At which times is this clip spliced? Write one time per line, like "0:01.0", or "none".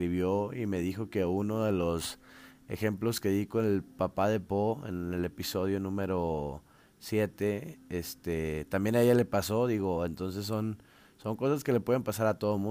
none